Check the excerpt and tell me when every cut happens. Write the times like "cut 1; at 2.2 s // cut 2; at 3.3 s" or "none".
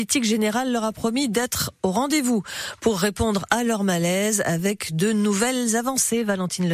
none